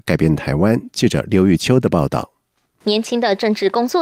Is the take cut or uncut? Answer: uncut